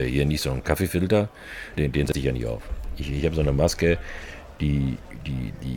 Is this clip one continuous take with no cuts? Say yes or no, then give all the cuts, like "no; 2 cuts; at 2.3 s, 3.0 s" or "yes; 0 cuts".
no; 1 cut; at 1.8 s